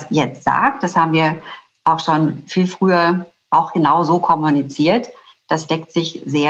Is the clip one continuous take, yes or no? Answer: yes